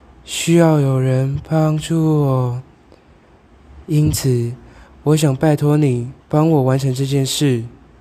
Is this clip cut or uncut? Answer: cut